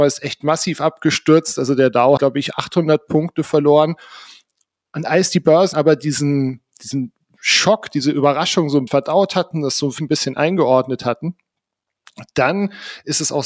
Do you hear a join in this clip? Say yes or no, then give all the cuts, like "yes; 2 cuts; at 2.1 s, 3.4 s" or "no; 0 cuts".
yes; 4 cuts; at 2.2 s, 5.7 s, 8.9 s, 10.0 s